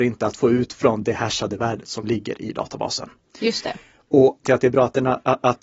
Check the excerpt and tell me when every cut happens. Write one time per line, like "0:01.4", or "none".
0:04.4